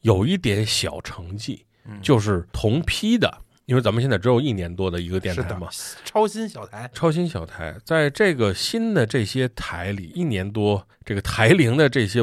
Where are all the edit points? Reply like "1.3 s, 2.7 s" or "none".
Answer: 2.5 s, 6.9 s, 10.9 s

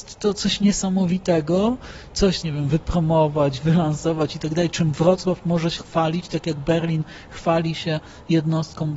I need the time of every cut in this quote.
2.4 s, 5.8 s

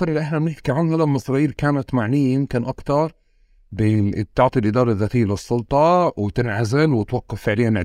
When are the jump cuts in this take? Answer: none

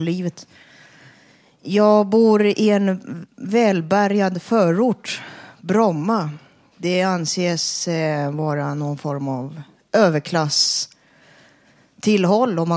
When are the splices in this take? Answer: none

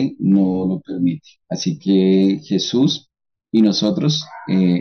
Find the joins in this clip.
none

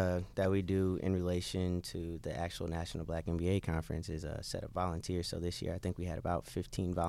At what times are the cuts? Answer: none

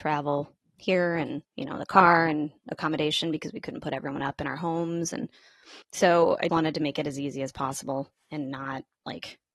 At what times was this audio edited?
1.5 s, 5.8 s, 6.5 s

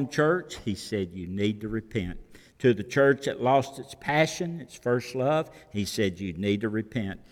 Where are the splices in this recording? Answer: none

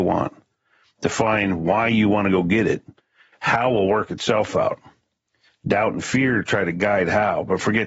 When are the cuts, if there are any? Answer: none

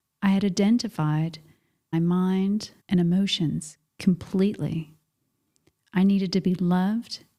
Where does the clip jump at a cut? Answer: 1.9 s, 2.8 s

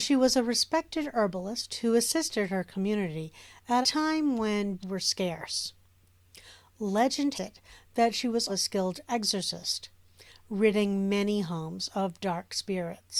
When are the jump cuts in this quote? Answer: 3.8 s, 4.8 s, 7.3 s, 8.5 s

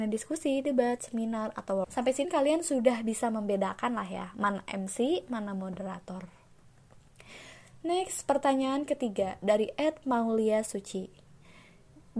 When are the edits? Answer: 1.8 s, 2.2 s

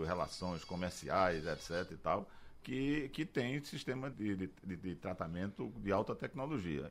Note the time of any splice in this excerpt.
4.1 s

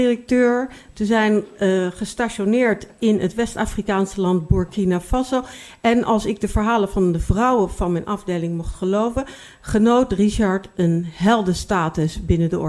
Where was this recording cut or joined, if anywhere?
none

